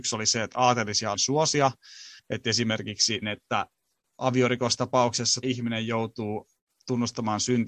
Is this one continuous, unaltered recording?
no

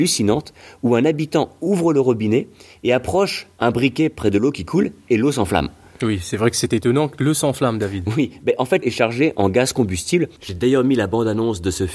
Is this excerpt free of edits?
no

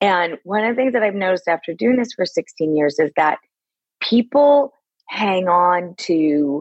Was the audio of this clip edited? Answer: no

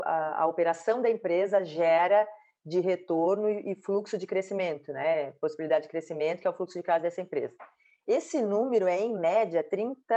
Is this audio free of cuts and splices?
yes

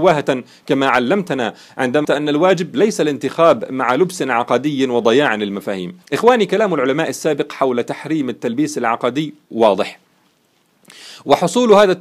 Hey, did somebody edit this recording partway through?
yes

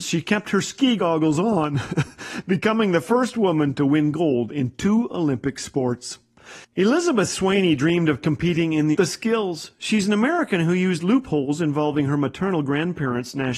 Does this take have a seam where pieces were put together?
yes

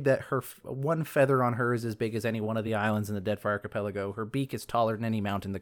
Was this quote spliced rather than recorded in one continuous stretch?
no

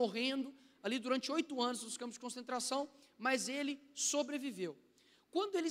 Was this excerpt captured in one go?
yes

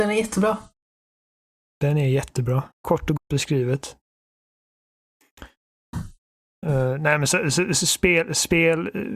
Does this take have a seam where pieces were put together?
yes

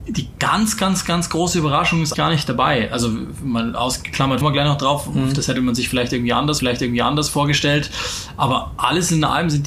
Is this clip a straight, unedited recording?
no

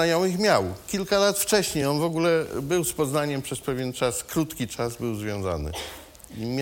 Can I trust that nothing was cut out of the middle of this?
yes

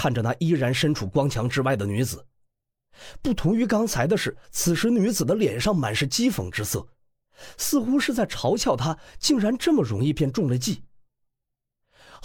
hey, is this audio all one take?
no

